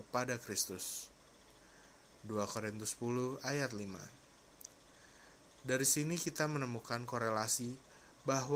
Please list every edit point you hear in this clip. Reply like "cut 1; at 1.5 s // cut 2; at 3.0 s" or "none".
none